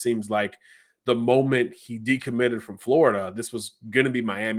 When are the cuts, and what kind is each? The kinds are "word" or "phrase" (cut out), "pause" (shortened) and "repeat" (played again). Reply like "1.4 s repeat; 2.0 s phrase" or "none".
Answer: none